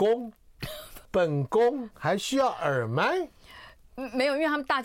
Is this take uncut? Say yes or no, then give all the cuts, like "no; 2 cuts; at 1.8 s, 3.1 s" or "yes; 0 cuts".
no; 1 cut; at 1.0 s